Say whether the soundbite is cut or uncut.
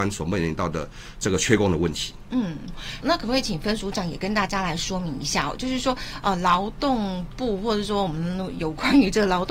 cut